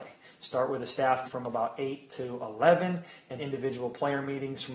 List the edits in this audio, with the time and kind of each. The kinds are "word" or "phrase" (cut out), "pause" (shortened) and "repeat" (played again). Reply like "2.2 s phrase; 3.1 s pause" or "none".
1.2 s word; 3.4 s word